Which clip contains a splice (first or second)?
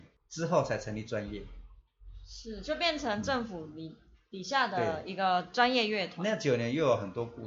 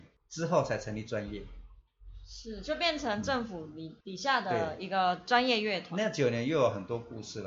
second